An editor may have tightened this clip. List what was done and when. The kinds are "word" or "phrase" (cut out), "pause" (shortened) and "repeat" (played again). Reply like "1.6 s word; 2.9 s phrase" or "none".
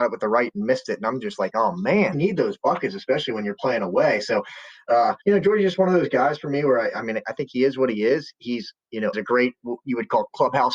2.1 s phrase; 5.2 s pause; 9.1 s phrase